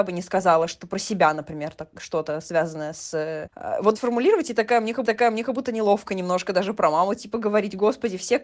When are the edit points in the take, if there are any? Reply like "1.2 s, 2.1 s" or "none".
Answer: 4.0 s, 5.1 s